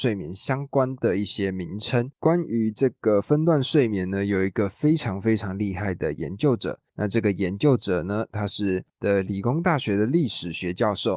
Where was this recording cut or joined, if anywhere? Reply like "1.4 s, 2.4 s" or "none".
2.1 s, 6.9 s, 8.9 s